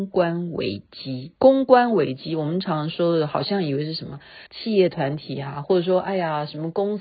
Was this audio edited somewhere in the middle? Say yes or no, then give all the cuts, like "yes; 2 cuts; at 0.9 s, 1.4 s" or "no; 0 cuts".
yes; 2 cuts; at 1.4 s, 4.5 s